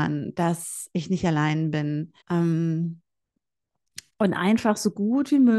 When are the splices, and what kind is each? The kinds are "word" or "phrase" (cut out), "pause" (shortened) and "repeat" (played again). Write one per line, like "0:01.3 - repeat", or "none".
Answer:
0:02.2 - pause